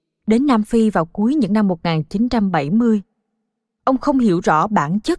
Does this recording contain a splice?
no; 0 cuts

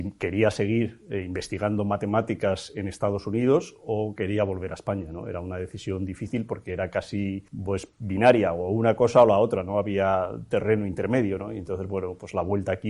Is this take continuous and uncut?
no; 1 cut; at 7.5 s

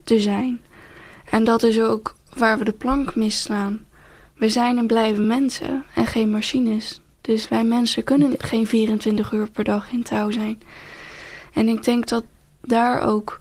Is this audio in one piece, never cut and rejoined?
yes; 0 cuts

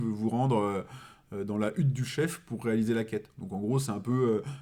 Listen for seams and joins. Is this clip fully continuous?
yes; 0 cuts

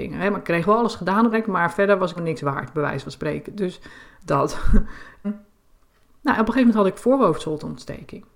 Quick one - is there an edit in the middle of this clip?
yes; 3 cuts; at 1.3 s, 2.2 s, 5.2 s

